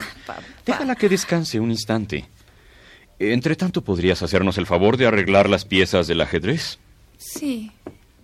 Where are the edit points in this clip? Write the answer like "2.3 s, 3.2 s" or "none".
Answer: none